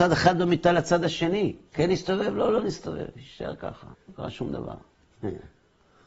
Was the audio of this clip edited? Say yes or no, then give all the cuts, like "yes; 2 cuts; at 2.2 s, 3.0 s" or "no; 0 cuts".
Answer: yes; 2 cuts; at 1.7 s, 3.9 s